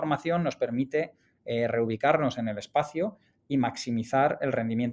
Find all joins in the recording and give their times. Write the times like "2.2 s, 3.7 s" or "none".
none